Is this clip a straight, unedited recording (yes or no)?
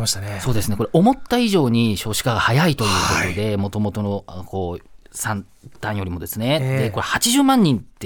yes